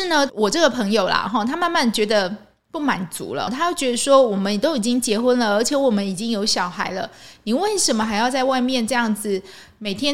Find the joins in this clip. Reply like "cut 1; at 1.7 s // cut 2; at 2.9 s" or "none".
cut 1; at 3.5 s